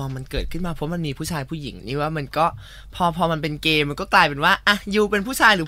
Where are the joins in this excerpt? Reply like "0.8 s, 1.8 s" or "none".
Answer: 1.8 s